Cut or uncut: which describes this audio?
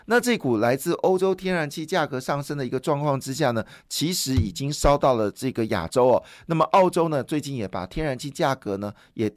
uncut